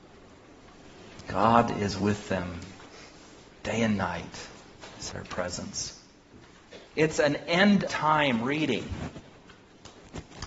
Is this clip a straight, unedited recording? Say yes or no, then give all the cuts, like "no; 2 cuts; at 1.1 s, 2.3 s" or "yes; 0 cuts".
no; 3 cuts; at 5.1 s, 6.9 s, 7.9 s